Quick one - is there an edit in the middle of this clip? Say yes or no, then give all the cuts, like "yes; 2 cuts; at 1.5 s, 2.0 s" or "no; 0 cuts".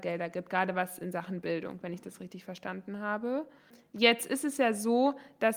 no; 0 cuts